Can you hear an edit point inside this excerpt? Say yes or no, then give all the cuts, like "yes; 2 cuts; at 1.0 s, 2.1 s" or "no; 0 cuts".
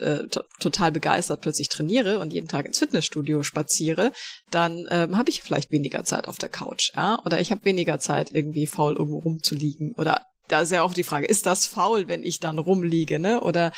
no; 0 cuts